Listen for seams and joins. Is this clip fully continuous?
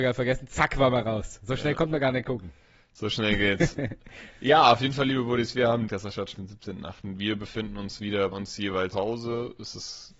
no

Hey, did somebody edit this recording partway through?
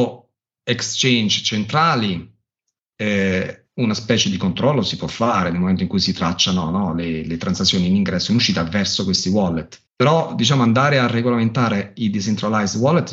yes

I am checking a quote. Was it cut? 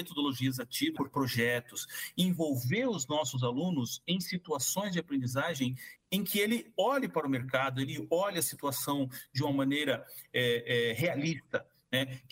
yes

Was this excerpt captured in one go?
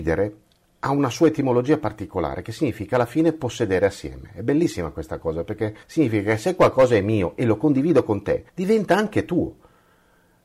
no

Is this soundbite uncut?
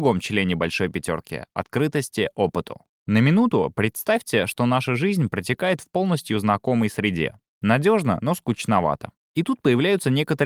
yes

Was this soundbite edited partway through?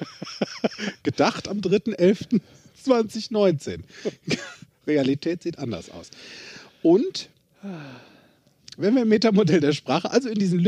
no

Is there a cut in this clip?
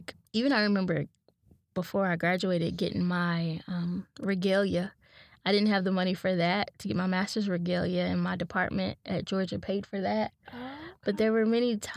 no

